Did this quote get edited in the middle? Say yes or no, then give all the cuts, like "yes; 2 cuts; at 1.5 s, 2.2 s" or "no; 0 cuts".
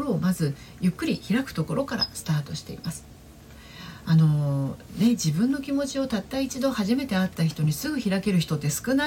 no; 0 cuts